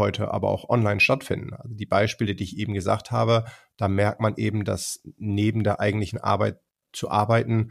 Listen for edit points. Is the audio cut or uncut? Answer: uncut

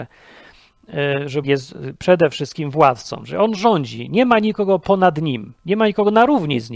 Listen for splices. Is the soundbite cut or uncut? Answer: cut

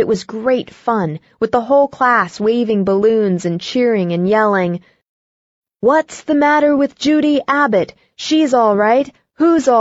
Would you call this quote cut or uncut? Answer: uncut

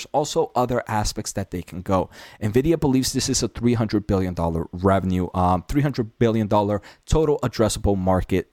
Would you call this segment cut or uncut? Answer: uncut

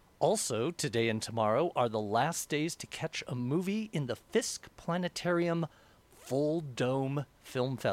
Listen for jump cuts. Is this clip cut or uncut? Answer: uncut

